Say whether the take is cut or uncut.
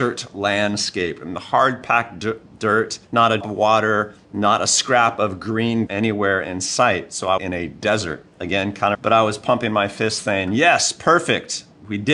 cut